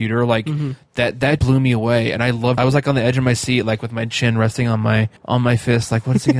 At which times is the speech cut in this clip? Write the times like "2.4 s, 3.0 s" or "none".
1.4 s, 2.6 s, 5.2 s